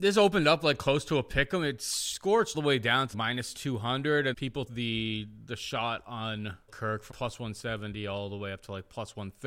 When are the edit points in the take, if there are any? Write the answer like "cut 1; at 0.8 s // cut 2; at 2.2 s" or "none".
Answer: cut 1; at 2.5 s // cut 2; at 3.1 s // cut 3; at 4.3 s // cut 4; at 4.7 s // cut 5; at 6.7 s // cut 6; at 7.1 s